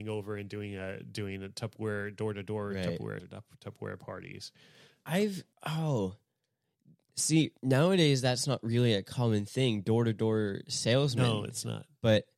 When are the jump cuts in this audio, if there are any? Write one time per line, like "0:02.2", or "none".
0:03.2
0:05.5
0:07.6